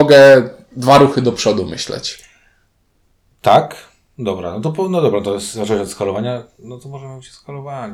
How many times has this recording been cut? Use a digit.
0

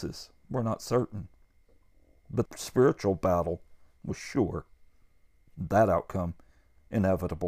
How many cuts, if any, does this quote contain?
1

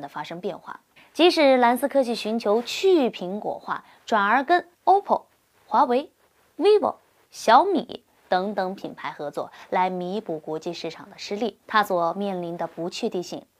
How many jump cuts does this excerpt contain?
3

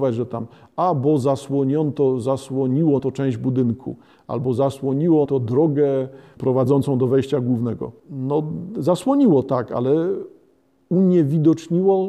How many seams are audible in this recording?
3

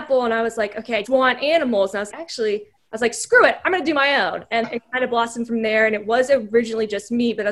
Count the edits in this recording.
3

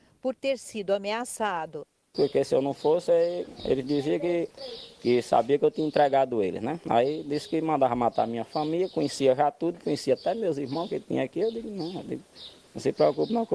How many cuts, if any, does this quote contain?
0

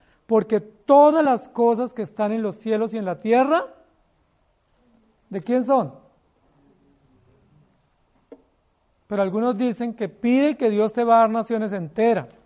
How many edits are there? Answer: 0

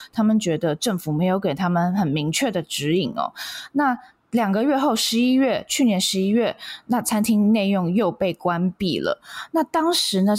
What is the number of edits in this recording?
0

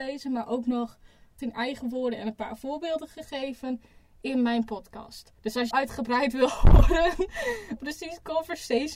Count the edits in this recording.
4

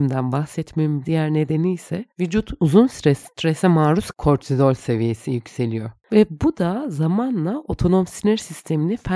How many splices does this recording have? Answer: 3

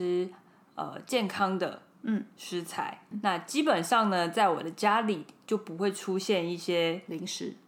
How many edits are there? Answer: 1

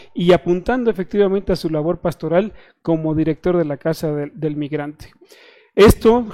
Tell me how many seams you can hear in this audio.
0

